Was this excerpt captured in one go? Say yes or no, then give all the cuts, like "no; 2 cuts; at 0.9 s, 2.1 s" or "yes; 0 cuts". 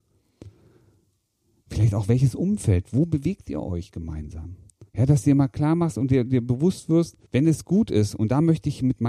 no; 2 cuts; at 4.9 s, 7.3 s